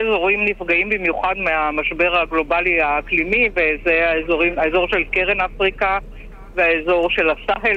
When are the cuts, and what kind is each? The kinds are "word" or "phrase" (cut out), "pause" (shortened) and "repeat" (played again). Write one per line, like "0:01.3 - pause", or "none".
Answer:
none